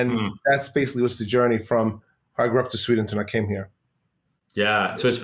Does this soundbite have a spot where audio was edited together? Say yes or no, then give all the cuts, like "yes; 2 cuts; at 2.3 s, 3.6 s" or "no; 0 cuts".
no; 0 cuts